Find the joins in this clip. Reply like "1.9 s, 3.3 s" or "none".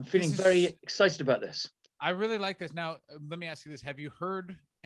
none